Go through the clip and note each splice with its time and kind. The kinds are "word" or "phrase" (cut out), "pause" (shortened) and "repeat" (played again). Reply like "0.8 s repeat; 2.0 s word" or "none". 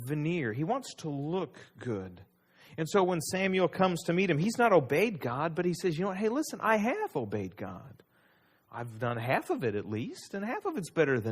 none